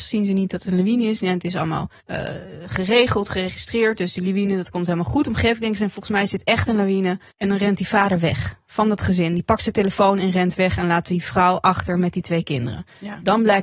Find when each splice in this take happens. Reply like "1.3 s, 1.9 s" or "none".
2.0 s, 7.3 s